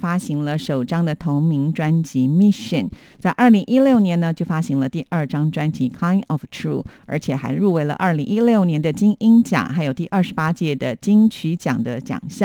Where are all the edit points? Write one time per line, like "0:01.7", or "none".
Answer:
none